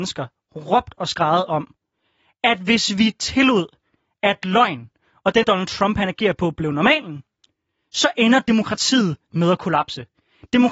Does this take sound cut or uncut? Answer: cut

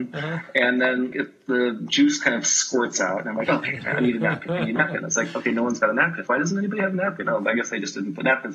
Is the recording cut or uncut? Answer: cut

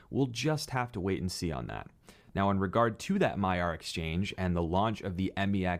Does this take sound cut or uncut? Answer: uncut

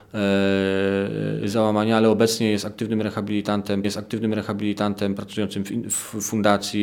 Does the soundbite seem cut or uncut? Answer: cut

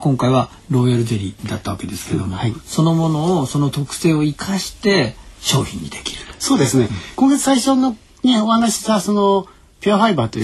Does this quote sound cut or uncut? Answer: uncut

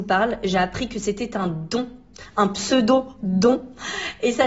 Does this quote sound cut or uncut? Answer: uncut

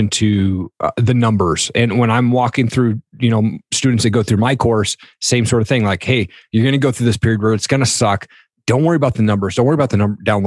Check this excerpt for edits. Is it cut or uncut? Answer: uncut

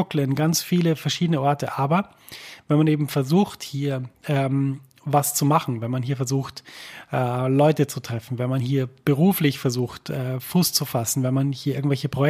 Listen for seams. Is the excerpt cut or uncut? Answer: cut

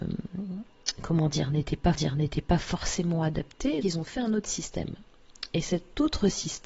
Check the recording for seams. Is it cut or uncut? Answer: cut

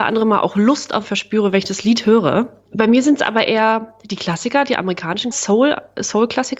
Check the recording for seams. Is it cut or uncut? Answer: cut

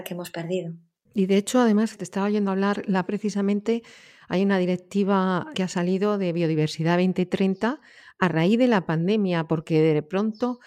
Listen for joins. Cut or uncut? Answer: cut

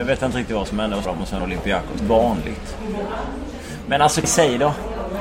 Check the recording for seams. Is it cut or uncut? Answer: cut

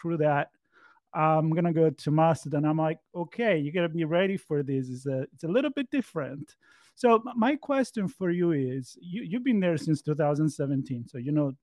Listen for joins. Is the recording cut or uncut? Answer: uncut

